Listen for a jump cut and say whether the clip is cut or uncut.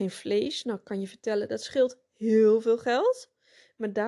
uncut